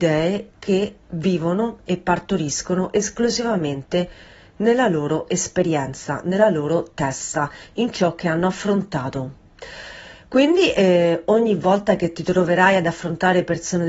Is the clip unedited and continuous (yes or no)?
yes